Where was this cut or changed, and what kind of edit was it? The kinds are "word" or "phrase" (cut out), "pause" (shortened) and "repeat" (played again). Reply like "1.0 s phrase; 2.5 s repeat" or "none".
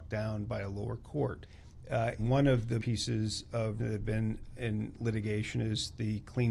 2.2 s word; 2.8 s word; 3.8 s word